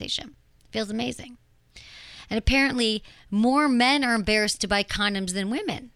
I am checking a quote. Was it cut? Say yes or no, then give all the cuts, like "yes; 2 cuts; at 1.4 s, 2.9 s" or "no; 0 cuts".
no; 0 cuts